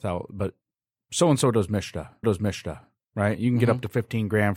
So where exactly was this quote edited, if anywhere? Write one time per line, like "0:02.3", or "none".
0:02.2